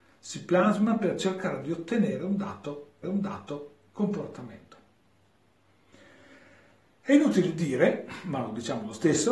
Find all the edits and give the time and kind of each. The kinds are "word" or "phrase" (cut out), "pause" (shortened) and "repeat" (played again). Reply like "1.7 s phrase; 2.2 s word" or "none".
3.0 s repeat